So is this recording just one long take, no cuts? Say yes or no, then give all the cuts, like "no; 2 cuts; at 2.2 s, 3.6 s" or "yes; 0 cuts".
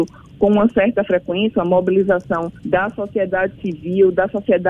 no; 1 cut; at 2.6 s